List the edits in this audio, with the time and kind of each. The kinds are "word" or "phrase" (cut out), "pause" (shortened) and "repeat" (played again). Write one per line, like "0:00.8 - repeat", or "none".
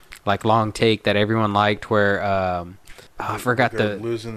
0:03.1 - pause